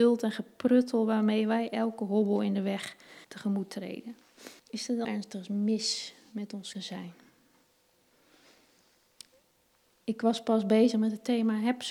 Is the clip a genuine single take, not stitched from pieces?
no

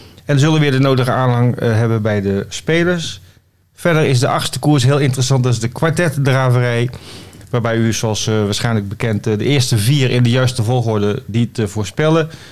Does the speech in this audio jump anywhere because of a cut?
no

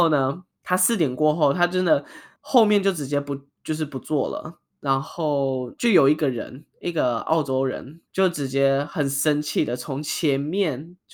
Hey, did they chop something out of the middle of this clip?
yes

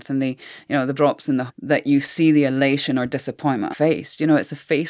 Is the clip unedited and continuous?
no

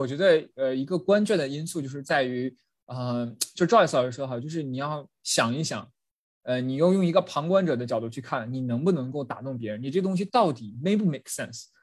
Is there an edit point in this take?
no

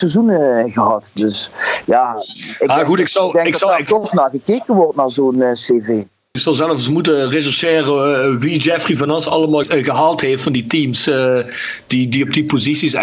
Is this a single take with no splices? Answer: yes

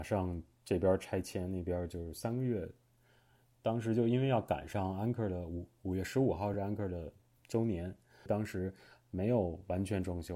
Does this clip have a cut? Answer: no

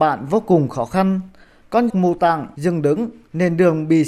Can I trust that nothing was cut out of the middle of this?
no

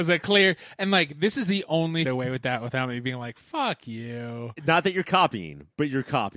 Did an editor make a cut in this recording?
yes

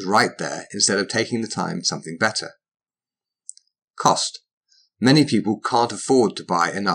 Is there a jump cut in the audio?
yes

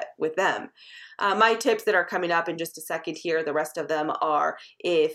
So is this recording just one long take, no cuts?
yes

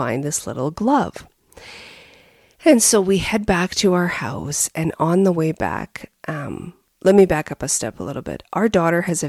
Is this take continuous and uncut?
yes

